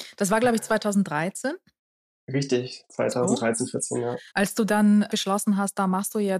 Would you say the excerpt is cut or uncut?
cut